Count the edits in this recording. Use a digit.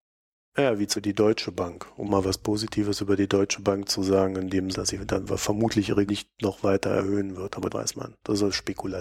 5